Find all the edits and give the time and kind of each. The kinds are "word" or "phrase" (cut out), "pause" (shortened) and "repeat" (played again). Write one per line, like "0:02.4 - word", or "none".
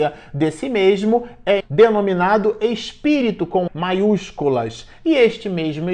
0:01.6 - word
0:03.7 - word